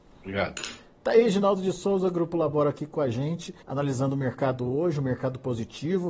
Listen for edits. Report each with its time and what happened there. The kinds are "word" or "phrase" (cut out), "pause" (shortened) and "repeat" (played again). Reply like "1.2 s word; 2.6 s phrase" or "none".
3.6 s pause